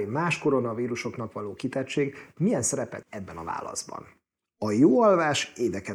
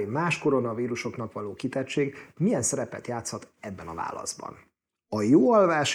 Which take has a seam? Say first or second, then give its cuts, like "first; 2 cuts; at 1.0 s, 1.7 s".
first; 1 cut; at 3.0 s